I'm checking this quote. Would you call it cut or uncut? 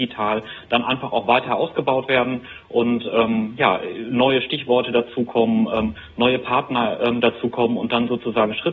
uncut